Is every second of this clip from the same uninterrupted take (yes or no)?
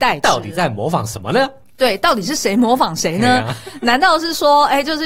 yes